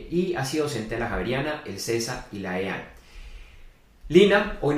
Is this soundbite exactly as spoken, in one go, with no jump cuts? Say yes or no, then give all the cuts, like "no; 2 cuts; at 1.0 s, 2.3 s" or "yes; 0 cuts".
yes; 0 cuts